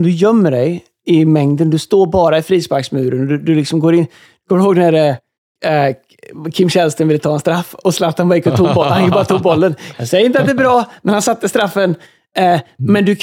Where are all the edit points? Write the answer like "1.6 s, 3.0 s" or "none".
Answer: none